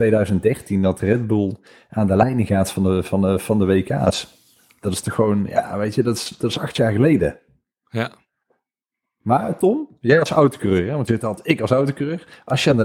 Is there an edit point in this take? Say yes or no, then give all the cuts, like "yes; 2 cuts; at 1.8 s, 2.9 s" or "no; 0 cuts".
no; 0 cuts